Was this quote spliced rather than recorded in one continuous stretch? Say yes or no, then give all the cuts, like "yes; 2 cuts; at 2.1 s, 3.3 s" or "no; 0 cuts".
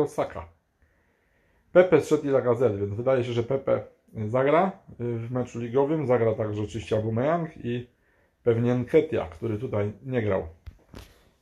no; 0 cuts